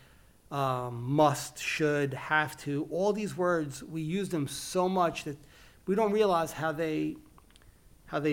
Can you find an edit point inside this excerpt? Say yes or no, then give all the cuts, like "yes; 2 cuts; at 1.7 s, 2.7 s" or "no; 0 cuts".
no; 0 cuts